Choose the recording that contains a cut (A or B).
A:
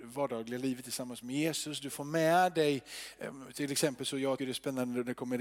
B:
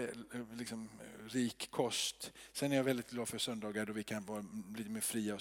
A